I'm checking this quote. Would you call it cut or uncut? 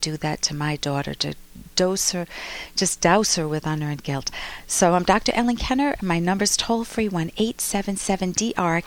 uncut